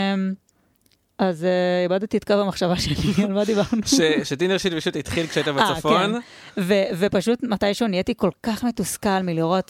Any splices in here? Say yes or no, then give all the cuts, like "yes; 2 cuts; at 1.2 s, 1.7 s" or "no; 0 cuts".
no; 0 cuts